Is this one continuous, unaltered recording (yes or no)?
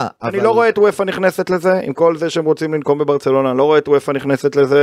yes